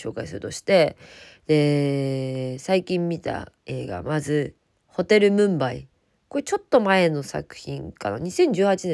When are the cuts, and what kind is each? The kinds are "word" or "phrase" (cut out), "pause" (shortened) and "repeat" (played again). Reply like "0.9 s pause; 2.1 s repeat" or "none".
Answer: 3.6 s pause; 4.6 s pause; 5.9 s pause